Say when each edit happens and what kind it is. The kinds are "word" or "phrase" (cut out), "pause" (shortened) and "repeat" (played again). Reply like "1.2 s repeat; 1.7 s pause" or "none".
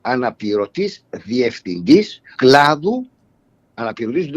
2.3 s word